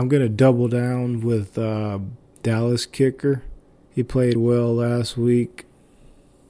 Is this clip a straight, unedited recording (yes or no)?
no